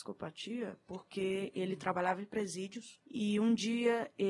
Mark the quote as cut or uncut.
uncut